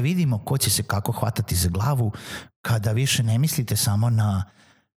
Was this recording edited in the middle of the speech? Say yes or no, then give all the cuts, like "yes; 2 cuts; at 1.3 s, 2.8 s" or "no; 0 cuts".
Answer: no; 0 cuts